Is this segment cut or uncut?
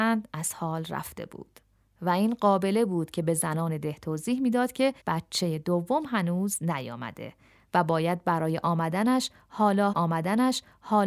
cut